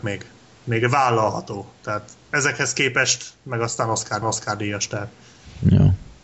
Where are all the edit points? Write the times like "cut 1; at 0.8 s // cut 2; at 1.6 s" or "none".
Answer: cut 1; at 4.2 s